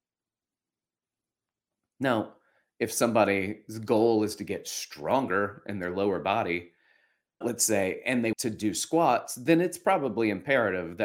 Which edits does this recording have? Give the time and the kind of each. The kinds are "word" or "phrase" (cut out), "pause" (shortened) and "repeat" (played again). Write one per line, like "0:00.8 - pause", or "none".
0:07.4 - word
0:08.3 - word